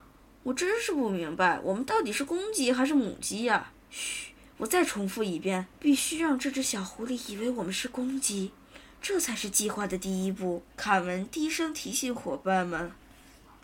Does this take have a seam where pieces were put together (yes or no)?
yes